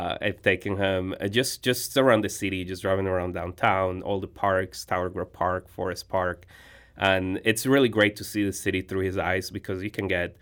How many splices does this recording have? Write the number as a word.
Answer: zero